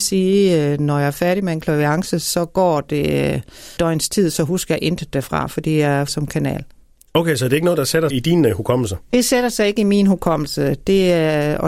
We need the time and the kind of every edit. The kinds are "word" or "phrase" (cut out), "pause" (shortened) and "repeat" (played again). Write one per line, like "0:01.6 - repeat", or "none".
0:03.8 - word
0:06.1 - word
0:08.1 - word